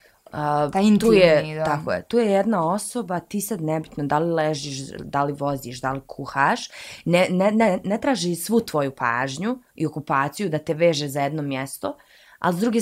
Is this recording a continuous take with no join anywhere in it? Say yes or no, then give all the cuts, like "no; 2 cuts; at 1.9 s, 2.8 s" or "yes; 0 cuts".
yes; 0 cuts